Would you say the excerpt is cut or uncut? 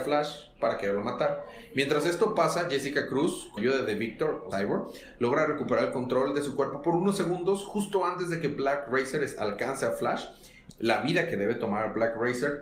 cut